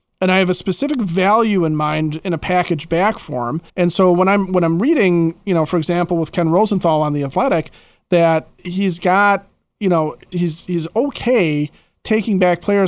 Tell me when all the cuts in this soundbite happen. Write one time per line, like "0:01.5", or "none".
0:03.7
0:10.3